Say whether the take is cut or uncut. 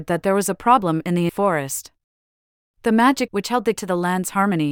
cut